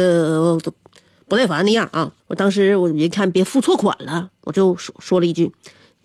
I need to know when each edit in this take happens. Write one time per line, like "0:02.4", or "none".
0:02.2